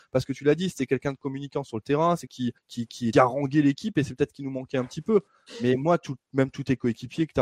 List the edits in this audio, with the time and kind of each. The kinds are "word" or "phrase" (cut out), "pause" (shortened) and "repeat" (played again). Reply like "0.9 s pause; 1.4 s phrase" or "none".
2.3 s word; 2.6 s pause; 3.1 s word